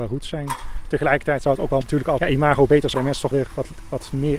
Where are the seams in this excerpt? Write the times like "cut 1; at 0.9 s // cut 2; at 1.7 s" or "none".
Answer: cut 1; at 1.8 s // cut 2; at 2.2 s // cut 3; at 2.9 s // cut 4; at 3.3 s